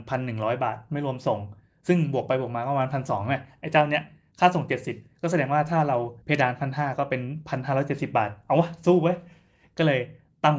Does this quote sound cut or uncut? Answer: cut